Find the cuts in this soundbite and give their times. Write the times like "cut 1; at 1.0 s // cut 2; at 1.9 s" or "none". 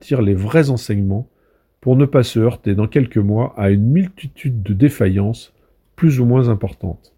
none